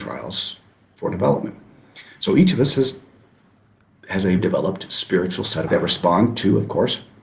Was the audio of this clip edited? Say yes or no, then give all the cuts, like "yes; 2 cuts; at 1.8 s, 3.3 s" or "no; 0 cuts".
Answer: yes; 2 cuts; at 4.4 s, 5.7 s